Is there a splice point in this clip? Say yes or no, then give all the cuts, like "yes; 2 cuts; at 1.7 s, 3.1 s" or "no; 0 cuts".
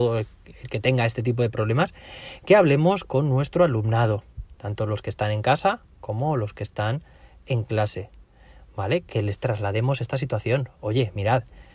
no; 0 cuts